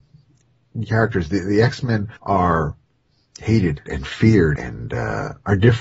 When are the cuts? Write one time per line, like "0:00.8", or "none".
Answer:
0:02.2
0:03.9
0:04.6